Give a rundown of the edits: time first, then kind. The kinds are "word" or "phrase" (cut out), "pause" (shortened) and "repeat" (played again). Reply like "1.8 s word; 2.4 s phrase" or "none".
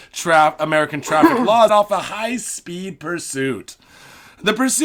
1.7 s word